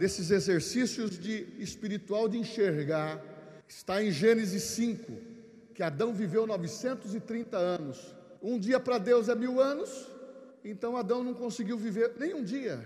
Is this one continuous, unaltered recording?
no; 3 cuts; at 3.6 s, 8.4 s, 10.5 s

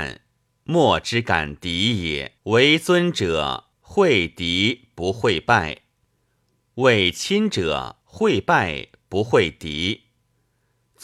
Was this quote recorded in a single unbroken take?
no; 3 cuts; at 2.4 s, 3.7 s, 8.0 s

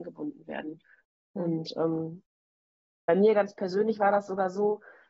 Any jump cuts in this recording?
no; 0 cuts

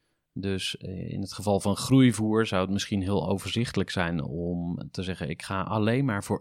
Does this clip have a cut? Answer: no; 0 cuts

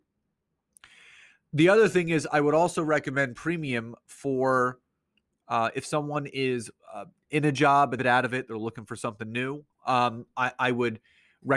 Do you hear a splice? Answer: yes; 3 cuts; at 6.8 s, 8.0 s, 9.7 s

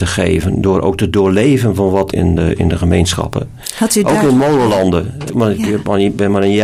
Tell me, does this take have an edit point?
yes; 2 cuts; at 2.1 s, 5.3 s

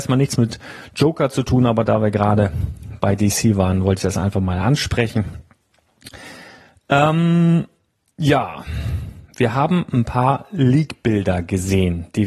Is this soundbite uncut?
yes; 0 cuts

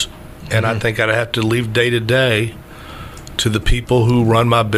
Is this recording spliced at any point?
no; 0 cuts

